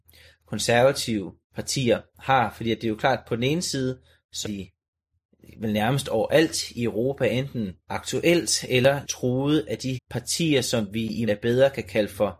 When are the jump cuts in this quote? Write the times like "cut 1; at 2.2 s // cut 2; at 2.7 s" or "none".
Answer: cut 1; at 1.4 s // cut 2; at 4.4 s // cut 3; at 7.8 s // cut 4; at 9.0 s // cut 5; at 9.9 s // cut 6; at 11.3 s